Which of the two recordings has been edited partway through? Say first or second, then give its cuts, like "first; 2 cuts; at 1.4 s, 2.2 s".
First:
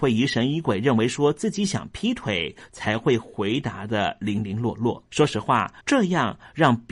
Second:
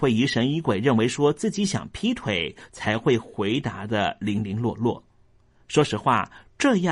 first; 2 cuts; at 5.1 s, 5.8 s